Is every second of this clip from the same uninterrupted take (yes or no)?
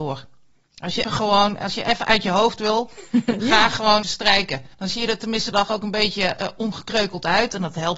no